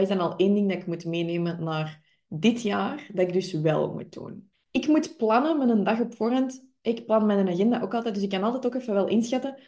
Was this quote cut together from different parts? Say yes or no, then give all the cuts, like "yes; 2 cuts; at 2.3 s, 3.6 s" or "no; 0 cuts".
no; 0 cuts